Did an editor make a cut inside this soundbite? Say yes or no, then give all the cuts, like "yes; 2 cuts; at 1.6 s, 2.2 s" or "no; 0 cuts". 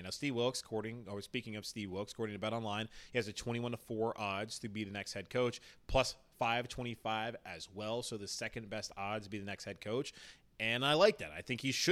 no; 0 cuts